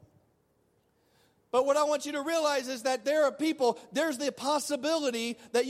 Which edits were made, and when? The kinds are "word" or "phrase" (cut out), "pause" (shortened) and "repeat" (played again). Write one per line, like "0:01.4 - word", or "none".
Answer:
none

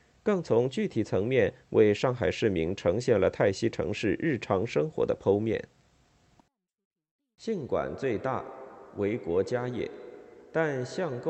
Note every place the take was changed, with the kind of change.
none

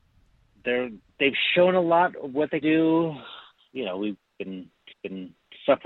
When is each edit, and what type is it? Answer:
0:02.6 - word
0:03.6 - pause
0:04.9 - repeat

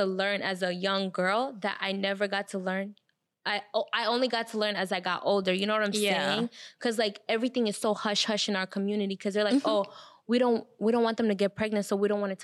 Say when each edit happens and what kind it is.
none

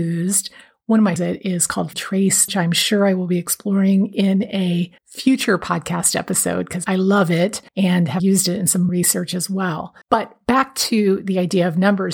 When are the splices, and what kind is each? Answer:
0:01.2 - phrase
0:01.9 - word
0:02.5 - phrase
0:05.0 - pause
0:07.7 - pause
0:08.2 - word
0:08.9 - phrase
0:10.0 - pause

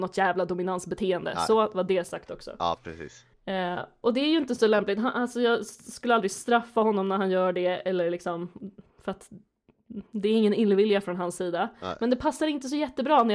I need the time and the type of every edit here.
0:03.3 - pause
0:10.1 - pause

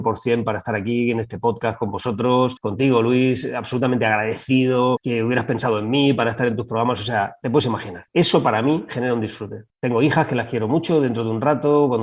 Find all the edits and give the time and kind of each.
0:08.1 - pause
0:09.7 - pause

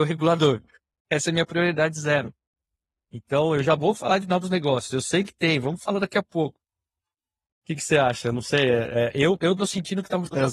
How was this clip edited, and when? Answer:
none

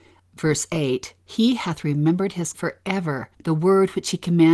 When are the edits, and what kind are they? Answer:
0:01.2 - pause
0:02.5 - word
0:03.3 - pause

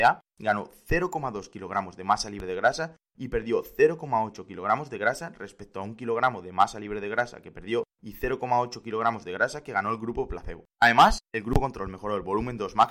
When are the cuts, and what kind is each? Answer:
0:07.9 - pause
0:10.7 - pause

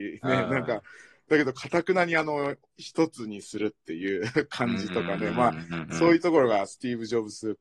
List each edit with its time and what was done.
none

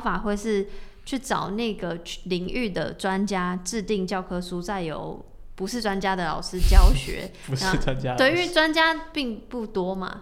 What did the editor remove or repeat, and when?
none

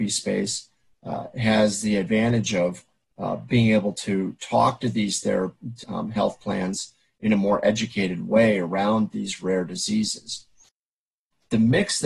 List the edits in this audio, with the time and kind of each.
0:05.8 - word

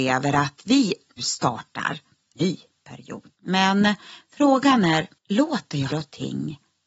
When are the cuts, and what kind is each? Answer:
0:01.2 - word
0:02.4 - word
0:03.3 - pause
0:05.2 - pause
0:05.9 - word

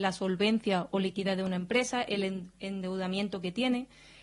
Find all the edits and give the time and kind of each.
none

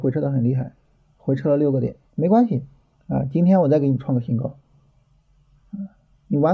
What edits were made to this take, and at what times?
0:02.1 - pause
0:02.9 - pause

